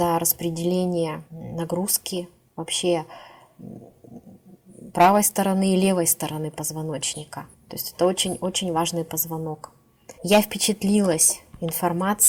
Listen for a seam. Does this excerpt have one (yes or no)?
yes